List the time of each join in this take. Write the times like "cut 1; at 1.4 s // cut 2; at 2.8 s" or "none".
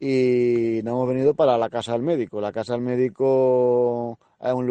none

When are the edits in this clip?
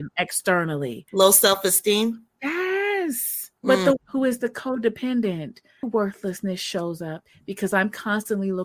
cut 1; at 1.1 s // cut 2; at 3.6 s // cut 3; at 4.0 s // cut 4; at 5.8 s

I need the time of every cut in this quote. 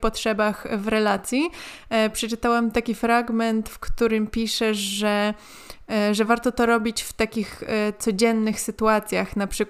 none

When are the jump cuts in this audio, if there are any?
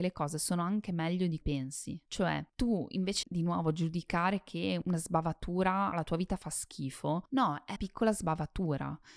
cut 1; at 1.4 s // cut 2; at 3.2 s // cut 3; at 5.9 s // cut 4; at 7.8 s

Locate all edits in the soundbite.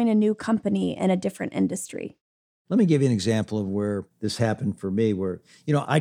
none

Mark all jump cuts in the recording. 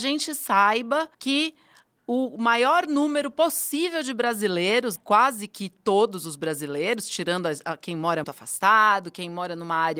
cut 1; at 1.1 s // cut 2; at 5.0 s // cut 3; at 8.2 s

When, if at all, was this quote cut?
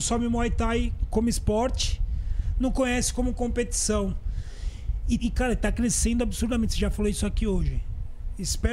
cut 1; at 5.2 s

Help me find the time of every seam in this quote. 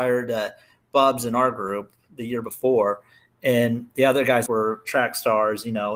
cut 1; at 4.5 s

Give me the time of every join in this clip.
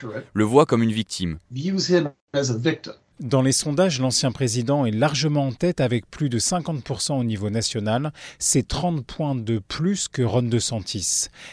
cut 1; at 3.0 s

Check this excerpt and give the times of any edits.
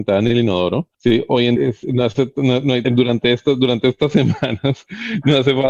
cut 1; at 0.9 s // cut 2; at 1.6 s // cut 3; at 2.8 s

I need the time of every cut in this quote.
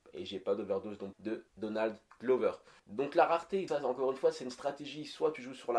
cut 1; at 1.1 s // cut 2; at 1.5 s // cut 3; at 2.8 s // cut 4; at 3.7 s

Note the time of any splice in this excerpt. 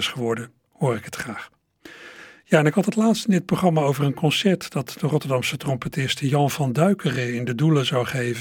none

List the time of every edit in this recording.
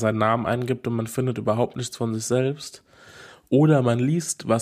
none

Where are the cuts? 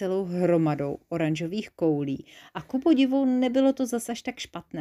none

